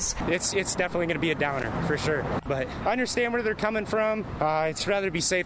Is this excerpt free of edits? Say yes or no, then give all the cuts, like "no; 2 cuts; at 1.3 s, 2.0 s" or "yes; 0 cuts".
yes; 0 cuts